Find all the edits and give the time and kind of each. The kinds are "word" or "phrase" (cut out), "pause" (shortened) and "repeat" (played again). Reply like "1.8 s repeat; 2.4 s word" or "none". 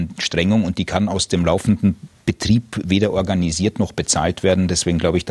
none